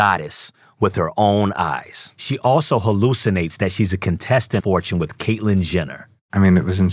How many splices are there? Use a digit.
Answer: 1